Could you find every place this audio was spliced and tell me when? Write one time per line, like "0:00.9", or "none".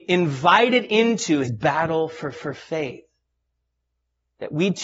0:01.4
0:02.3